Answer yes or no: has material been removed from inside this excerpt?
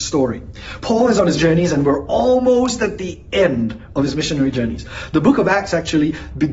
yes